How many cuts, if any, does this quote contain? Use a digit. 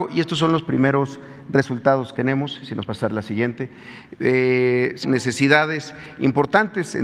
3